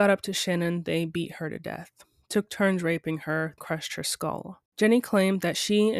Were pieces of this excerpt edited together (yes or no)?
yes